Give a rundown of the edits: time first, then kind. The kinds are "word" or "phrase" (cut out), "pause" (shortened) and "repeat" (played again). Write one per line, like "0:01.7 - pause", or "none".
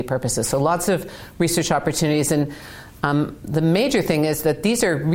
none